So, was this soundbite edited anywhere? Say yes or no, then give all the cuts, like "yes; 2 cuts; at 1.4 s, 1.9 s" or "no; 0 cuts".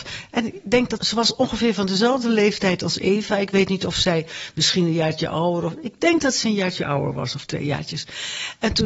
yes; 1 cut; at 1.0 s